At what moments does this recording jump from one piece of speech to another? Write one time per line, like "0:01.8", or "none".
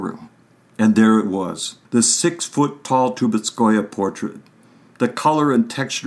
0:01.8